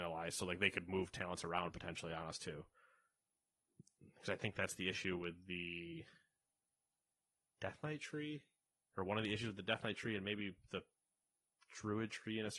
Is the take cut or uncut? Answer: uncut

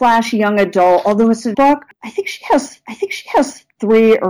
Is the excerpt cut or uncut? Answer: cut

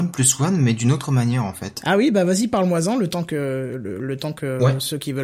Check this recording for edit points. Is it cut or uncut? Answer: uncut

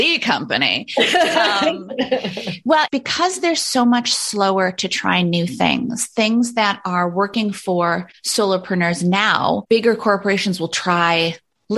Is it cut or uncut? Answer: uncut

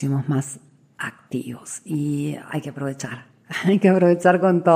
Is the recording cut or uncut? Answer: uncut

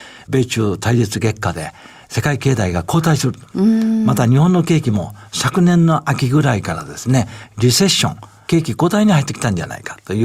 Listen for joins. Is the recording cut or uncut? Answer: uncut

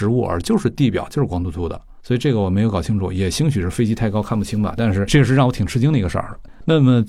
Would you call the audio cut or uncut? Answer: cut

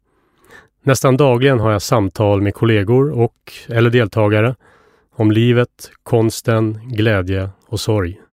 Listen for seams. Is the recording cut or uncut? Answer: uncut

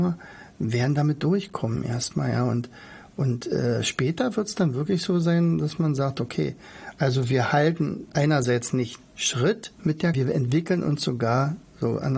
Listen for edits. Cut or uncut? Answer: cut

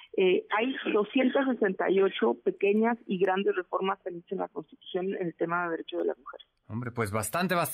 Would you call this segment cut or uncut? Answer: uncut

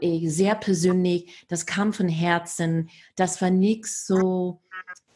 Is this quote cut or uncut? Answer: uncut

